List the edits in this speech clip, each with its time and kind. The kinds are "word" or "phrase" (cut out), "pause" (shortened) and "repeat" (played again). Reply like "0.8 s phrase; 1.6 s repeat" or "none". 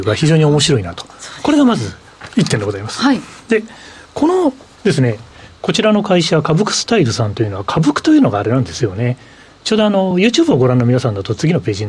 none